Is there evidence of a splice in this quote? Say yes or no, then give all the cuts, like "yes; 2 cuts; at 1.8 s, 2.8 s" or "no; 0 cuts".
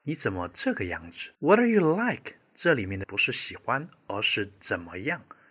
yes; 2 cuts; at 1.3 s, 3.0 s